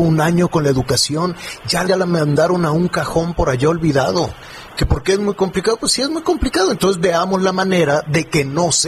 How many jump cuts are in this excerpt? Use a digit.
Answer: 1